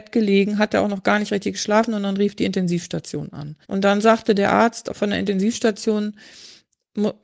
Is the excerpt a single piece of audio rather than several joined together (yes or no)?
no